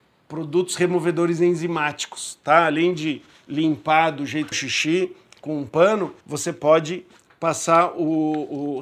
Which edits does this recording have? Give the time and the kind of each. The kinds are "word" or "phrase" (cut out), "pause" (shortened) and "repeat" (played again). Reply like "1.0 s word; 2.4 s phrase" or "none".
4.5 s phrase; 6.2 s pause